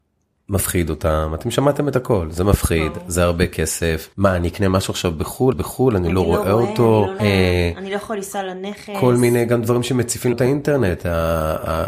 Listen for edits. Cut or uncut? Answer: cut